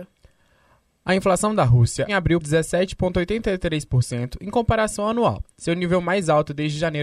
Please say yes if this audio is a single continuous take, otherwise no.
no